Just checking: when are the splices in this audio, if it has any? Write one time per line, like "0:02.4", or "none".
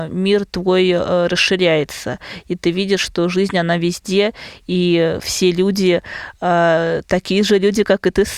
none